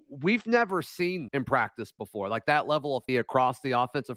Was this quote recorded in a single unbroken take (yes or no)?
no